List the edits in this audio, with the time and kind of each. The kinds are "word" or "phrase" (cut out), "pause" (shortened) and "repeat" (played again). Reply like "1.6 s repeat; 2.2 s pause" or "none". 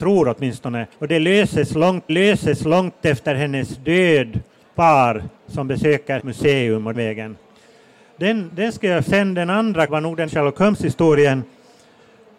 0.9 s pause; 2.1 s repeat; 4.7 s phrase; 5.3 s pause; 6.2 s phrase; 6.9 s word; 9.1 s phrase; 9.9 s word; 10.3 s word